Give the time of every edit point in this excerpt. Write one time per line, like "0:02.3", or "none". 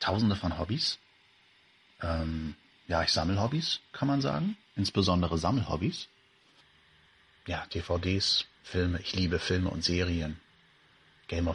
none

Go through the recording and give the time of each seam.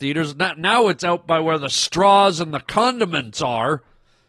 none

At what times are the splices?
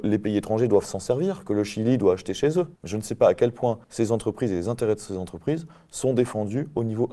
0:02.8
0:03.8

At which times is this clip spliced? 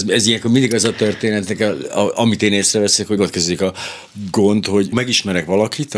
0:03.2
0:04.9

